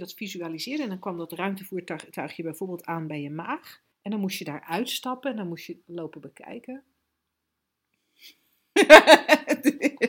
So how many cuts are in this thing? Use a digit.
2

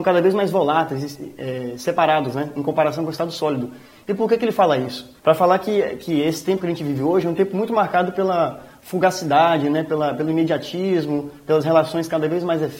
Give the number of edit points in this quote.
1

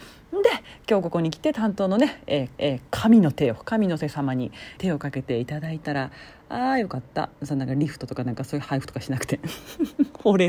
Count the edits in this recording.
2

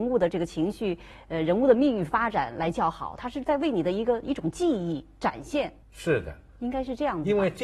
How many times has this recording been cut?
1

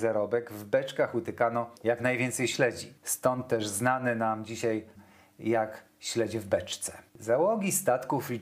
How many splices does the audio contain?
4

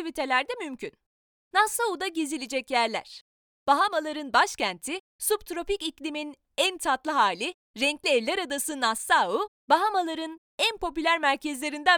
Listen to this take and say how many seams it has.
0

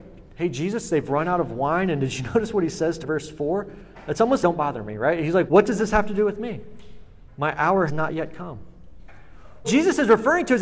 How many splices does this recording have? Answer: 5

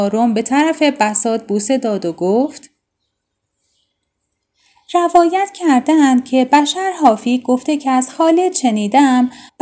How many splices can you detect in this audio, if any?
0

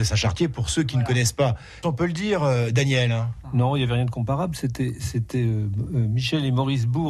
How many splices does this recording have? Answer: 1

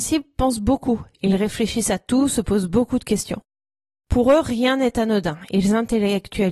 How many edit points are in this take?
0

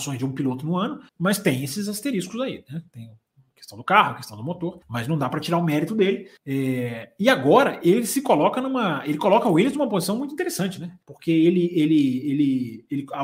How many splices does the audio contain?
4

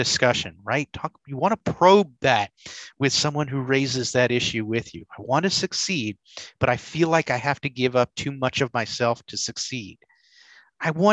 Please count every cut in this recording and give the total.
0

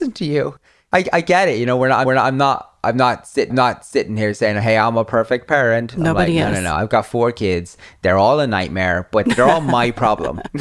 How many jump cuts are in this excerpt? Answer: 2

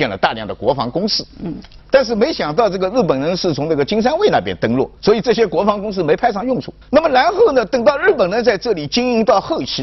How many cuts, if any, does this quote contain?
3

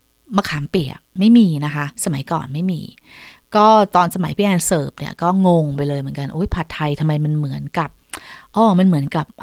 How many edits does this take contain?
1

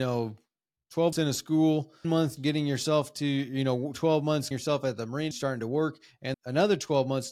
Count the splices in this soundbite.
6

